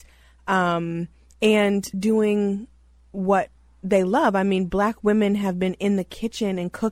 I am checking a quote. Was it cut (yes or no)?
yes